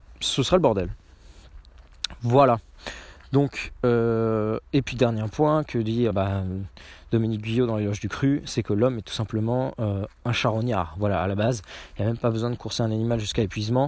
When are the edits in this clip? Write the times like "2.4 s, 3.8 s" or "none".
6.1 s